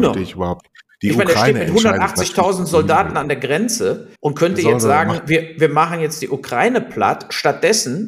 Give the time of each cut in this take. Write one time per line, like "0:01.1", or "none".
0:04.1